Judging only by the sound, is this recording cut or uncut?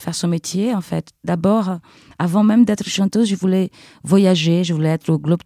uncut